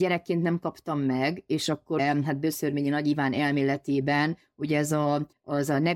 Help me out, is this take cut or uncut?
cut